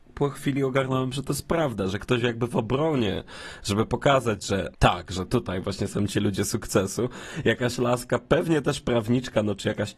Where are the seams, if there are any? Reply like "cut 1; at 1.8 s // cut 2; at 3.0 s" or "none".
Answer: cut 1; at 4.7 s